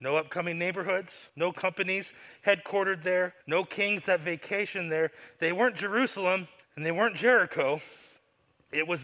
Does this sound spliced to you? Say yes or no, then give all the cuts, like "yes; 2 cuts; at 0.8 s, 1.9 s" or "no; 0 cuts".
yes; 3 cuts; at 1.3 s, 3.4 s, 6.6 s